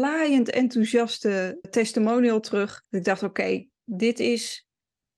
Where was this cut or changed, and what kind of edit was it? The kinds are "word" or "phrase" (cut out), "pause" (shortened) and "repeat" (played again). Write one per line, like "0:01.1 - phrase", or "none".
0:01.6 - word
0:02.8 - pause